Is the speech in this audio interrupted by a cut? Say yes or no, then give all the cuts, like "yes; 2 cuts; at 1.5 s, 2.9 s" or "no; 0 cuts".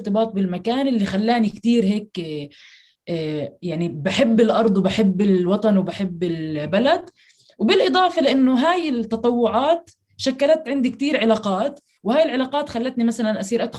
no; 0 cuts